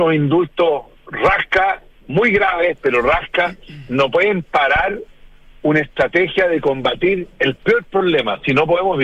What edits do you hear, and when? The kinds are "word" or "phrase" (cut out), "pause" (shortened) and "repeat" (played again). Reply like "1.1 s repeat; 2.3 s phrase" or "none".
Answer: none